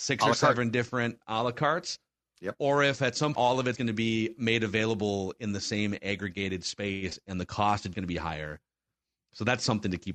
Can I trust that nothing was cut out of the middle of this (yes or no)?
no